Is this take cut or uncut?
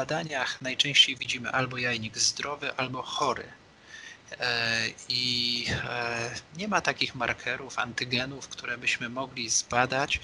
uncut